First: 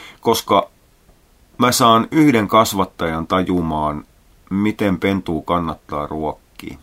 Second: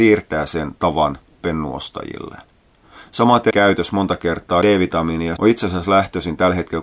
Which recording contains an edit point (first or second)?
second